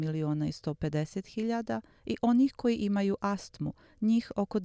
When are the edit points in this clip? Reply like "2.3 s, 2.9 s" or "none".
none